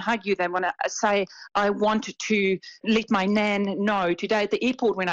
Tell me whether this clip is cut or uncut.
cut